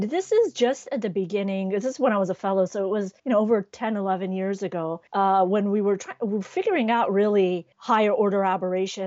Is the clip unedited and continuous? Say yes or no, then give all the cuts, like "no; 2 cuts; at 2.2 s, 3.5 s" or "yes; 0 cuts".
no; 3 cuts; at 3.2 s, 5.1 s, 7.7 s